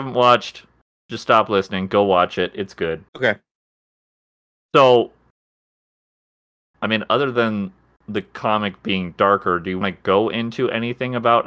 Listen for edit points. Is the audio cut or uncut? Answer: cut